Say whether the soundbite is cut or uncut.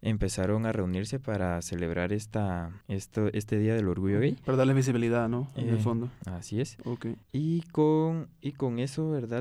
cut